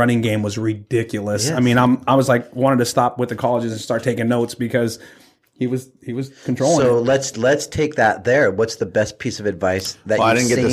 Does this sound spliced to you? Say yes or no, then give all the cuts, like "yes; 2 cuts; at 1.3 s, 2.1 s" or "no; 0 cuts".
no; 0 cuts